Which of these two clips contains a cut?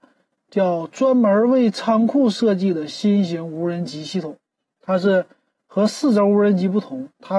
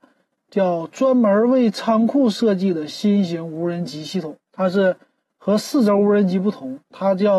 second; 1 cut; at 4.4 s

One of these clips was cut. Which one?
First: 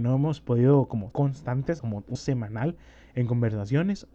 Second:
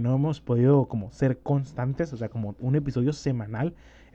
first; 3 cuts; at 1.1 s, 1.8 s, 2.2 s

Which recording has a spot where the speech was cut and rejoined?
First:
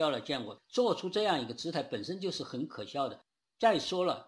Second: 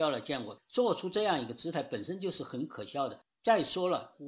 second; 1 cut; at 3.3 s

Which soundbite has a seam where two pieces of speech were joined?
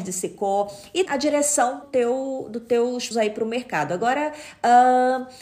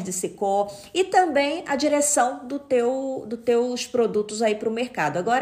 first; 3 cuts; at 1.1 s, 1.8 s, 3.1 s

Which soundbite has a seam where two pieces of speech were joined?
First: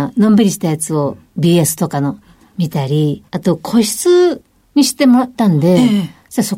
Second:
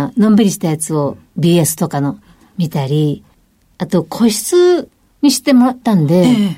first; 1 cut; at 3.3 s

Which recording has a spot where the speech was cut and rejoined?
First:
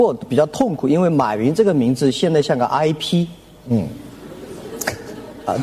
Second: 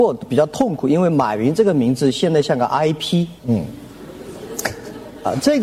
second; 1 cut; at 3.4 s

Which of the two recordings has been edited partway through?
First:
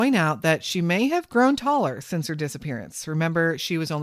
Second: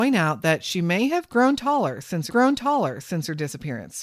second; 1 cut; at 2.3 s

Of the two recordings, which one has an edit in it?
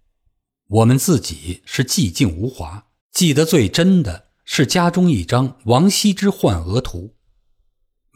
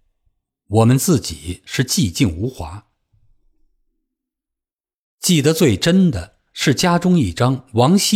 first; 1 cut; at 3.0 s

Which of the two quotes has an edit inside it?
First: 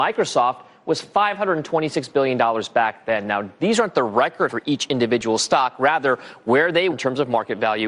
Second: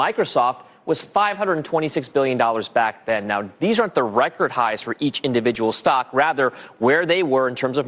first; 2 cuts; at 4.5 s, 6.9 s

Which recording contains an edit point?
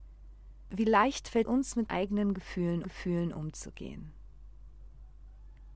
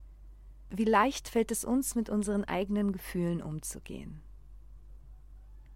first; 3 cuts; at 1.4 s, 1.9 s, 2.8 s

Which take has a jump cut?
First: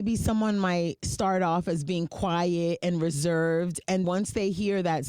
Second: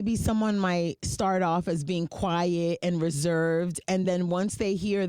first; 1 cut; at 4.0 s

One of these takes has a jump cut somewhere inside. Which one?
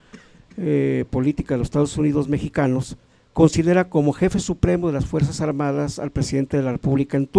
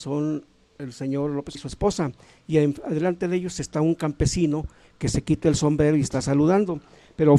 second; 1 cut; at 1.5 s

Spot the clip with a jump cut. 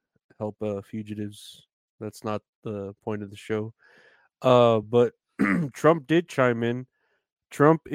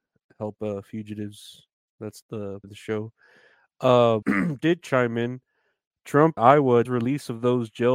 second; 6 cuts; at 2.2 s, 2.6 s, 4.2 s, 4.6 s, 6.4 s, 6.8 s

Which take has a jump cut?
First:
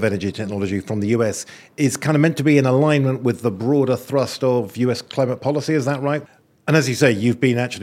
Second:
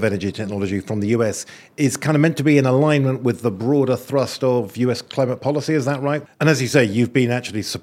second; 1 cut; at 6.3 s

